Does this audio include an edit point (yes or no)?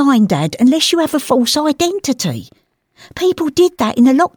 no